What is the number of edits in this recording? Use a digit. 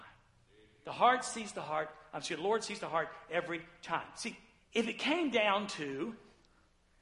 1